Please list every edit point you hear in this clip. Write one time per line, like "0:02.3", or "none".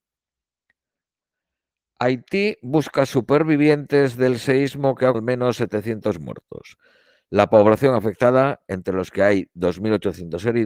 0:05.1